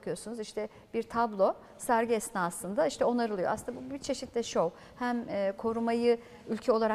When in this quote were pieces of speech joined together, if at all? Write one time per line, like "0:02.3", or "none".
none